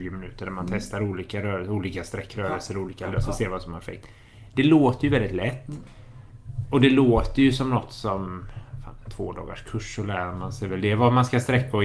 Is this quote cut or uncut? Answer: cut